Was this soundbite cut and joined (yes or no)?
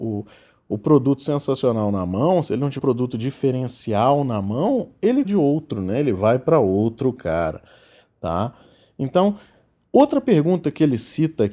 yes